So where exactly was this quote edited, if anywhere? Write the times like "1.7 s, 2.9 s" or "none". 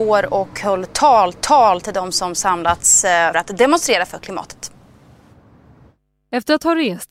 1.3 s, 3.3 s